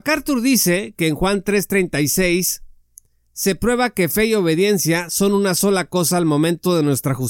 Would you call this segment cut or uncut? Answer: uncut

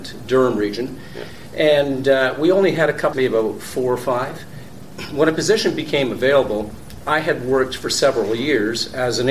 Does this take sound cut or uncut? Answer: cut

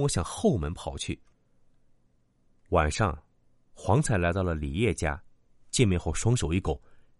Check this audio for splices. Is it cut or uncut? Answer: uncut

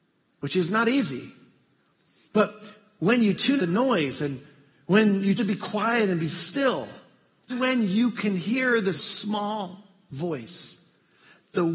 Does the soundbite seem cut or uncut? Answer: cut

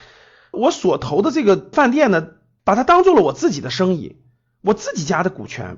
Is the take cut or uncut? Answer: uncut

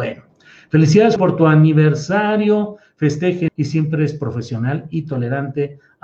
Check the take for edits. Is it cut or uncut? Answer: cut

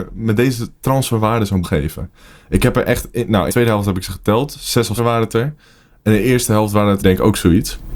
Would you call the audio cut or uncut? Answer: cut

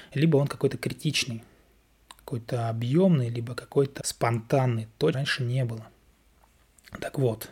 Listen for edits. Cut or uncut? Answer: cut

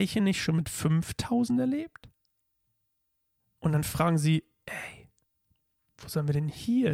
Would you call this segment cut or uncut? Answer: uncut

